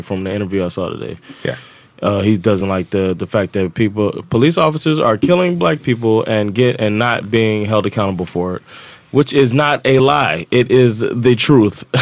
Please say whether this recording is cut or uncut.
uncut